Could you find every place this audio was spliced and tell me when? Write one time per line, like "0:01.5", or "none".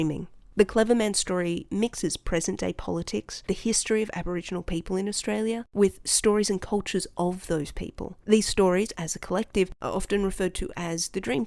none

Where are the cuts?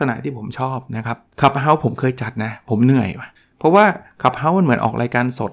0:01.3
0:03.4

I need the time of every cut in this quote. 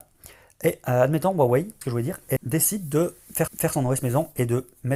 0:01.8
0:02.4
0:03.5

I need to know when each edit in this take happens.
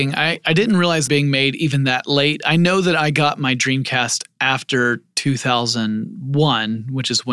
0:01.1

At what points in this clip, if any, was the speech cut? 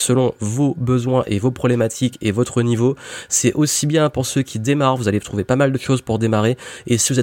none

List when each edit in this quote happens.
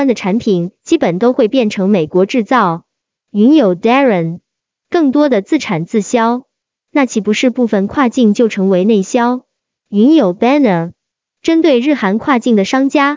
none

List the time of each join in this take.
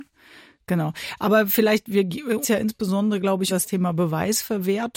0:02.4
0:03.5

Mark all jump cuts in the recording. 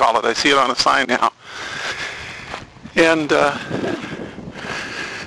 0:01.0

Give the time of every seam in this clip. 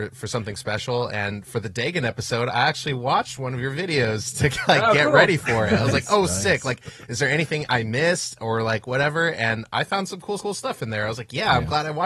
0:10.4

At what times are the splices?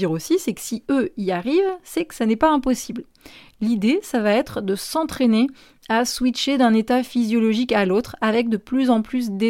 none

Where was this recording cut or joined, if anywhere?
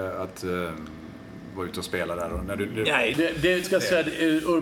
0:03.1
0:03.6

